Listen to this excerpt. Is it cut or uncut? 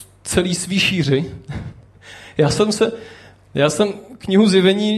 uncut